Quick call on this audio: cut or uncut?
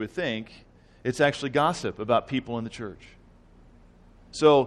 uncut